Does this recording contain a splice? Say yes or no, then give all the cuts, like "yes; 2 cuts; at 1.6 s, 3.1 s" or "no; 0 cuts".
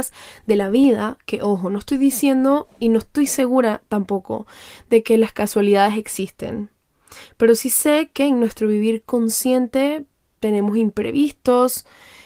no; 0 cuts